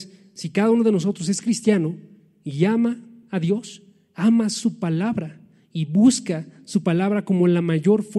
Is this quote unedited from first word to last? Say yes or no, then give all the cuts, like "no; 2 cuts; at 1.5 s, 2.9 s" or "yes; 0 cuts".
yes; 0 cuts